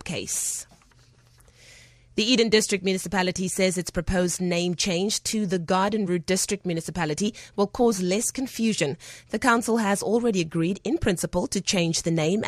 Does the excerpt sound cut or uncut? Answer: uncut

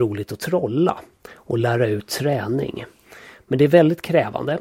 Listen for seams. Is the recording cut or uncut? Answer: uncut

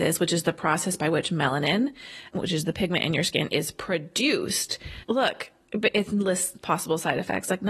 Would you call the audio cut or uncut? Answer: uncut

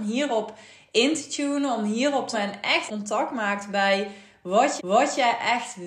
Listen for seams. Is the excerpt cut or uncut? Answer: cut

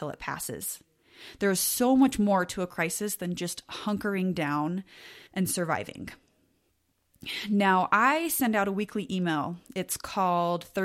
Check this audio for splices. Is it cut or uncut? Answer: cut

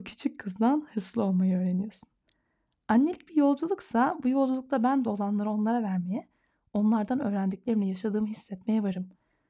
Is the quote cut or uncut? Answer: uncut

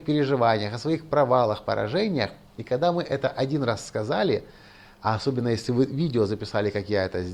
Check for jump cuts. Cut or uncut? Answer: uncut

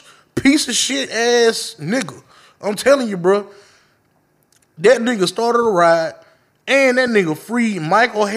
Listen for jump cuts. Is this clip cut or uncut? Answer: uncut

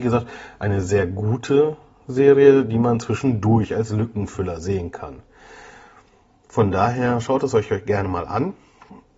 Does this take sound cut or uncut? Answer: uncut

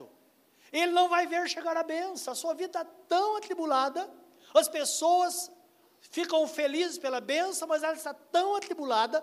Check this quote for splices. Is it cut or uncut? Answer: uncut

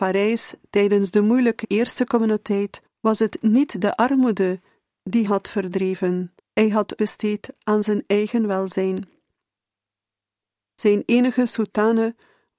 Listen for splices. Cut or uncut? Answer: cut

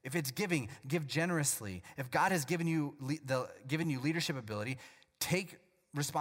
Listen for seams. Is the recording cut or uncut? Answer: uncut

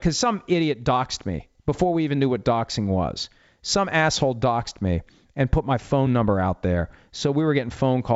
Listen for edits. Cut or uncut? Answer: uncut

